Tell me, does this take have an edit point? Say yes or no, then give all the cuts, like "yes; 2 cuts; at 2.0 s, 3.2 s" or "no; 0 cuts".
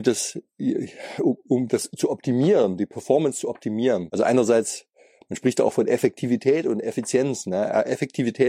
no; 0 cuts